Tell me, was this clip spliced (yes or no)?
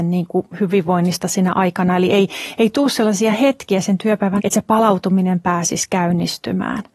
yes